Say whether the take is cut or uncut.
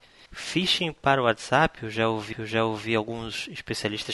cut